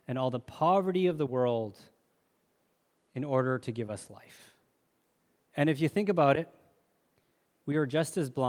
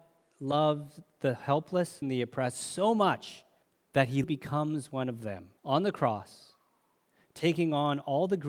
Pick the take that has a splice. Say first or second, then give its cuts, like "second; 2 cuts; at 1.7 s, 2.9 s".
second; 4 cuts; at 2.0 s, 3.6 s, 4.2 s, 5.6 s